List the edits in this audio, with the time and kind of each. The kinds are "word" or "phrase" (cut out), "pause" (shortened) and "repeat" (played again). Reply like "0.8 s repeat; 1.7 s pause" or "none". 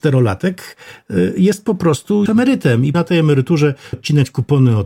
2.3 s word; 2.9 s word; 3.9 s word